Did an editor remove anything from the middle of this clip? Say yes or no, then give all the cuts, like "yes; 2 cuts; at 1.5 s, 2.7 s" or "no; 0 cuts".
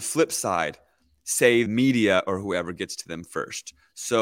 yes; 1 cut; at 1.7 s